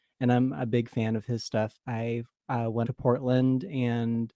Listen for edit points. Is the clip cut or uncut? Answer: cut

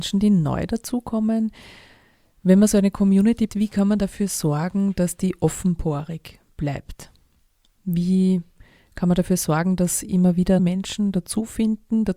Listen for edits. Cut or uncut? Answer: cut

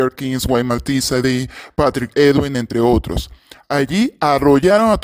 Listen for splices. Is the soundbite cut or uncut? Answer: uncut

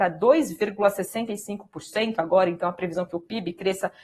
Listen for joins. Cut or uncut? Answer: uncut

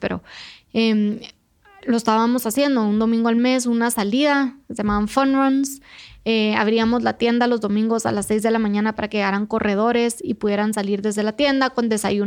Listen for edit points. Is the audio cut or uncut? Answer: uncut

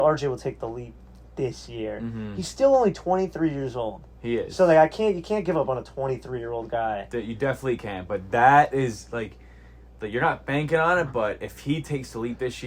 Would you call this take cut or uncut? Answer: uncut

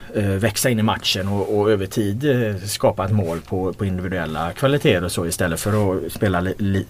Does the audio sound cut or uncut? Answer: uncut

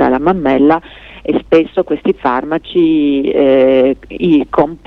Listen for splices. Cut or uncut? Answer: uncut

